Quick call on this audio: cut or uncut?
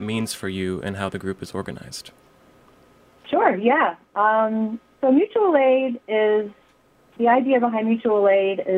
uncut